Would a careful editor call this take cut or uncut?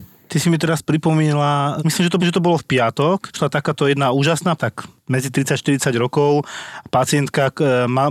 cut